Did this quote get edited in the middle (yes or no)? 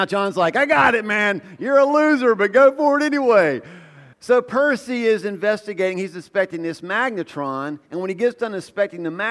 yes